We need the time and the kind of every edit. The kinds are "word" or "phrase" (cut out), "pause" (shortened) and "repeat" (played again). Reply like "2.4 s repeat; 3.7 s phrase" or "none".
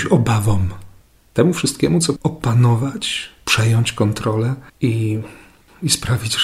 1.1 s pause; 2.2 s word; 4.7 s pause